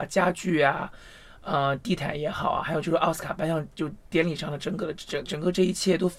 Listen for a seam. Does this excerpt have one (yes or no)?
no